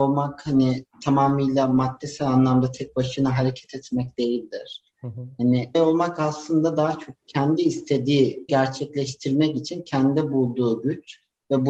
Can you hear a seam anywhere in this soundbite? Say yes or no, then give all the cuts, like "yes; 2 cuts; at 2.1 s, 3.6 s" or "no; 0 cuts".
yes; 3 cuts; at 5.7 s, 7.2 s, 8.5 s